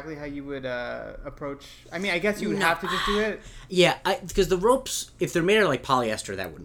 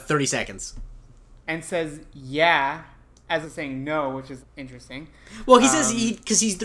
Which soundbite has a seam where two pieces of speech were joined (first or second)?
second